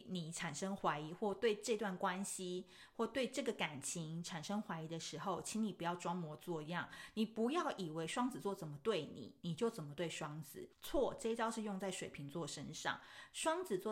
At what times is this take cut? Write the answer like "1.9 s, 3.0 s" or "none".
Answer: 10.7 s